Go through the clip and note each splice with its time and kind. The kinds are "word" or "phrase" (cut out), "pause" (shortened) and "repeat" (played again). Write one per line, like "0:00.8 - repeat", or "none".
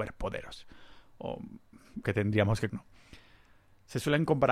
0:02.0 - word
0:02.7 - word